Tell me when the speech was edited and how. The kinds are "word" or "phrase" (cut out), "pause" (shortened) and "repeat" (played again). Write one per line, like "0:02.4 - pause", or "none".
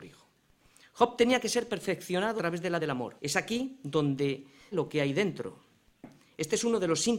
0:02.4 - word
0:02.8 - word
0:03.2 - pause
0:04.7 - word